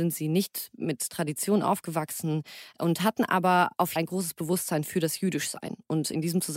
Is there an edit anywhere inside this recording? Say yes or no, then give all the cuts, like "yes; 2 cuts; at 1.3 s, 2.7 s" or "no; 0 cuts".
yes; 1 cut; at 4.0 s